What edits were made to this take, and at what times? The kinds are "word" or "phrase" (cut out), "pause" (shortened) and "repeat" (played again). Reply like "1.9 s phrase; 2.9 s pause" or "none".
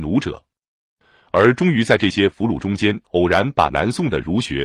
3.0 s pause